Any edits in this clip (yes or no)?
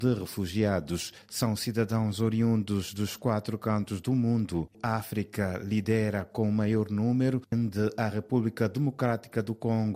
no